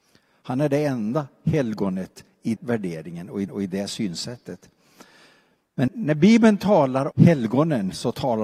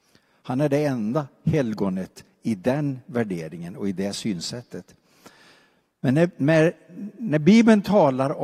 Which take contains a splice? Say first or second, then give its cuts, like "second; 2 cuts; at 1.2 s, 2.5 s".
first; 4 cuts; at 2.6 s, 3.5 s, 5.9 s, 7.1 s